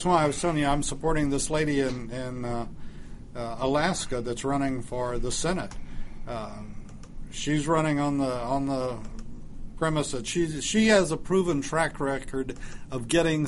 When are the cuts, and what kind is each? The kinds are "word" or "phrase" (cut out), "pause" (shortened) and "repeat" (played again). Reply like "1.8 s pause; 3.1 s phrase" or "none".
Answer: none